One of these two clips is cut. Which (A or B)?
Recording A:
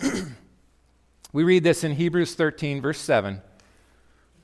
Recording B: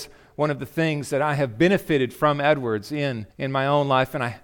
B